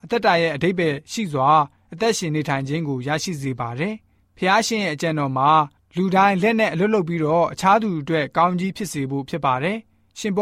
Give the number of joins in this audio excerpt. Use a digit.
0